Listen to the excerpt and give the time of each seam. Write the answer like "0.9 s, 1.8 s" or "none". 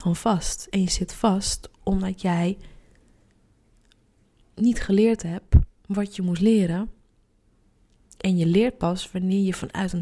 none